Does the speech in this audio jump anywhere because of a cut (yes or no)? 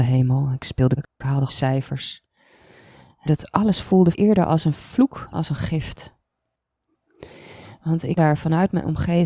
yes